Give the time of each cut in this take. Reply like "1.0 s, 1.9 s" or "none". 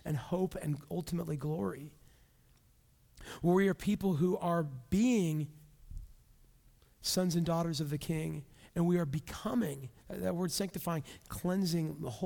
none